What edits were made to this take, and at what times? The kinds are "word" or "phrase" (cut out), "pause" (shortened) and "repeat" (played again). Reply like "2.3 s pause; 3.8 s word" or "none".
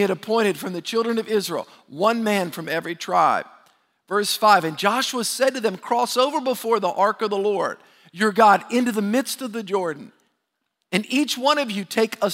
none